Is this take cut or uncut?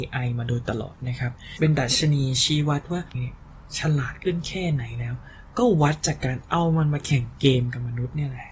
cut